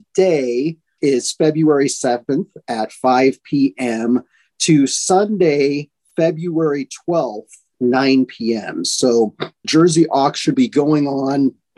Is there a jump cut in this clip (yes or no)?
yes